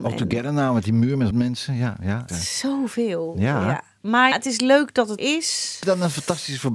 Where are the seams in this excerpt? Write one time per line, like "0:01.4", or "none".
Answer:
0:01.3
0:02.3
0:04.3
0:05.2
0:05.8

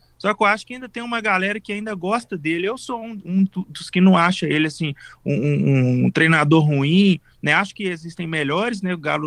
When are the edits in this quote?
none

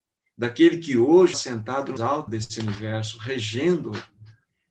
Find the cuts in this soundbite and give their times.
0:01.3
0:02.0
0:02.3

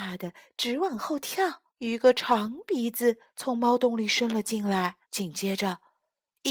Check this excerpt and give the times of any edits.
0:01.7
0:03.3
0:05.0

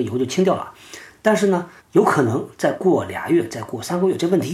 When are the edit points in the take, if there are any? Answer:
0:01.8

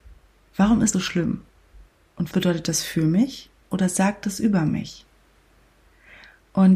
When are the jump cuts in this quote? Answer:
0:00.9
0:02.3
0:03.6

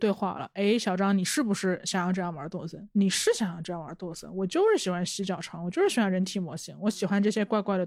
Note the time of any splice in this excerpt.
0:02.9

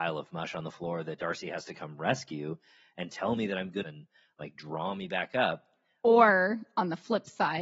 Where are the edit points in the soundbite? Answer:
0:03.8

